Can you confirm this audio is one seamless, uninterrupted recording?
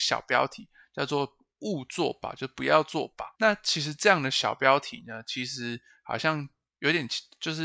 no; 1 cut; at 3.3 s

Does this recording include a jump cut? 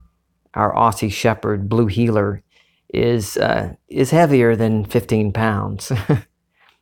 no; 0 cuts

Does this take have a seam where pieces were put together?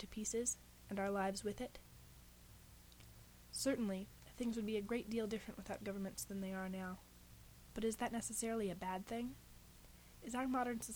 no; 0 cuts

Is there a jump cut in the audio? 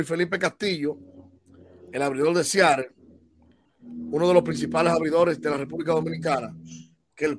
no; 0 cuts

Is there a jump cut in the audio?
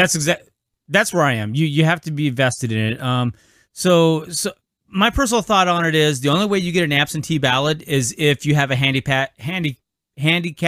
no; 0 cuts

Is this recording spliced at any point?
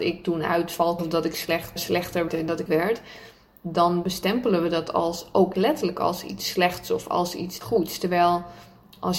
yes; 6 cuts; at 1.0 s, 1.8 s, 2.3 s, 2.7 s, 5.5 s, 7.6 s

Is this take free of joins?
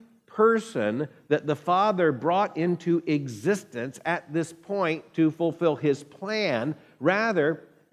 yes; 0 cuts

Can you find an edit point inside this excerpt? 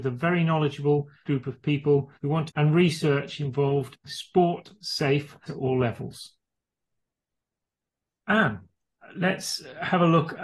yes; 5 cuts; at 1.3 s, 2.2 s, 2.5 s, 4.0 s, 5.5 s

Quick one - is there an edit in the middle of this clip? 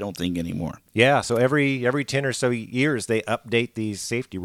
no; 0 cuts

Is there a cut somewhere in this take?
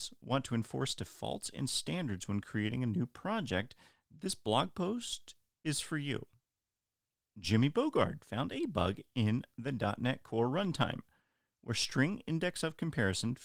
no; 0 cuts

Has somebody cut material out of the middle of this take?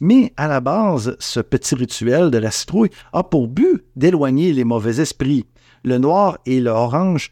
no; 0 cuts

